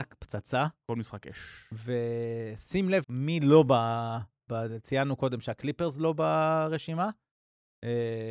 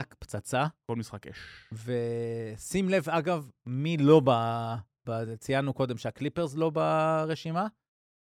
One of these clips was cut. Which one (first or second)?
first